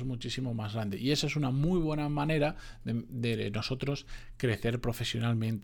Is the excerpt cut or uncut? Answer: uncut